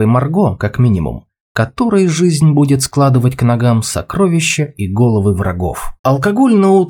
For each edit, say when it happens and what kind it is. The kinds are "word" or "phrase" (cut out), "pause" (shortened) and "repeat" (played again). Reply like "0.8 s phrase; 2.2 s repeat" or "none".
6.0 s pause